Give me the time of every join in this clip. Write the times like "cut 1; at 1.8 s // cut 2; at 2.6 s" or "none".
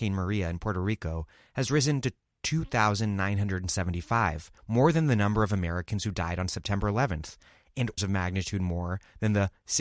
cut 1; at 4.6 s // cut 2; at 8.0 s